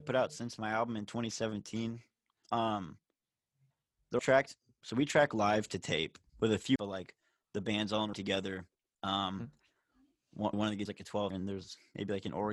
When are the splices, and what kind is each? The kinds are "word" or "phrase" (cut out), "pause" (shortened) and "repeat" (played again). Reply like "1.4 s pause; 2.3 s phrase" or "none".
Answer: 4.2 s word; 6.3 s word; 6.8 s word; 8.1 s word; 10.5 s word; 10.9 s word; 11.3 s word

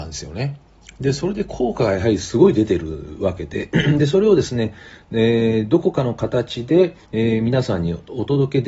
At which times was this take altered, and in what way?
7.0 s pause

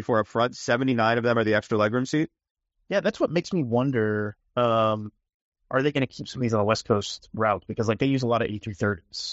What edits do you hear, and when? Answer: none

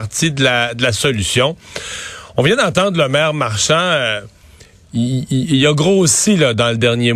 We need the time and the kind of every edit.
none

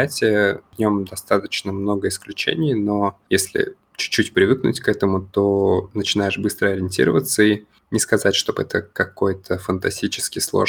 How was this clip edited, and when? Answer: none

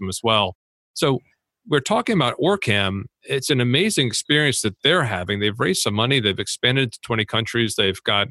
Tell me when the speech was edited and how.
none

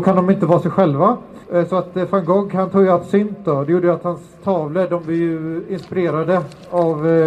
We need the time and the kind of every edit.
1.4 s pause

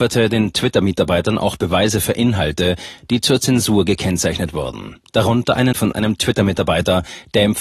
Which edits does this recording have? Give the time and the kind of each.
5.7 s word

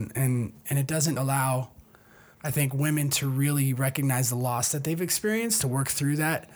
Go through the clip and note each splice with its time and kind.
1.2 s word; 5.6 s phrase

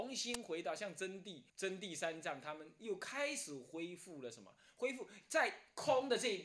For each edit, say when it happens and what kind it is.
1.5 s pause

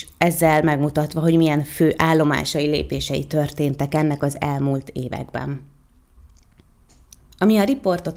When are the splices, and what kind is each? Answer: none

